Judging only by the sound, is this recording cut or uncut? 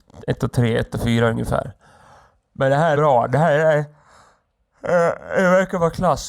cut